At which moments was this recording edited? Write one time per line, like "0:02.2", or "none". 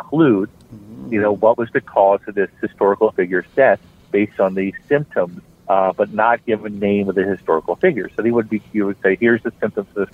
0:05.5
0:06.7